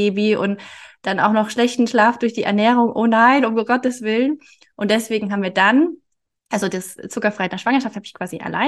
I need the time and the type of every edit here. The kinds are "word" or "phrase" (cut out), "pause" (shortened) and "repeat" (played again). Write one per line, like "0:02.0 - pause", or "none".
none